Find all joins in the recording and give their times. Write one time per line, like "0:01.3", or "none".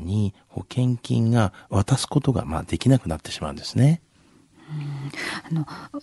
none